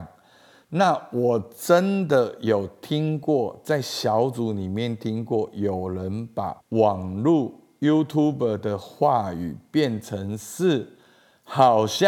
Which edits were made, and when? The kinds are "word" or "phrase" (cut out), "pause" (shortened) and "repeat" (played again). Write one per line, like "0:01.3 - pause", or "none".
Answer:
0:06.6 - pause